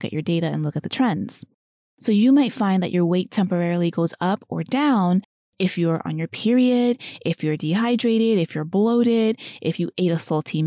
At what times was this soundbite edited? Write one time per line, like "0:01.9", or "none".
0:01.8